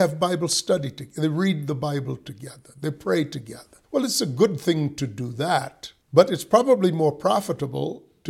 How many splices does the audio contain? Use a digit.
2